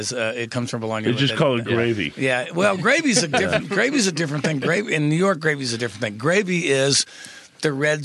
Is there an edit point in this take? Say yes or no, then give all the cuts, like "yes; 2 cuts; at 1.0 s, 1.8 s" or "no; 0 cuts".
no; 0 cuts